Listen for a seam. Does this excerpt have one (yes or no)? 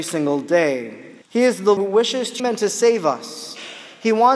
yes